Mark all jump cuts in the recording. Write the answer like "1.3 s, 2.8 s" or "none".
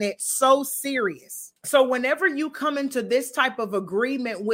1.6 s